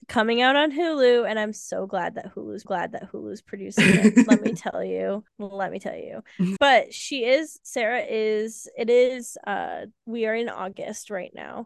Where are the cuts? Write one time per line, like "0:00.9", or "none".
0:02.6
0:05.3
0:06.6
0:10.0